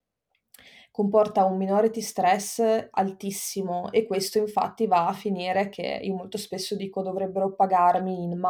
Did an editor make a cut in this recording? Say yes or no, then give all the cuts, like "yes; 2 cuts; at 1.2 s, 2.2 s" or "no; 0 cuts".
no; 0 cuts